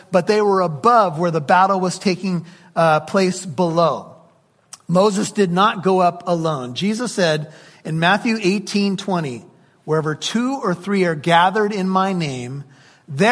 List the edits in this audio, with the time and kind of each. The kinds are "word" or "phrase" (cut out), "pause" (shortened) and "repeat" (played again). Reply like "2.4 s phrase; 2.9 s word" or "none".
none